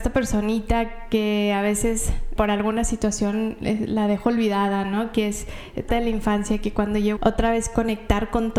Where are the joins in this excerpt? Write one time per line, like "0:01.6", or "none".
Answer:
0:02.4
0:05.9
0:07.2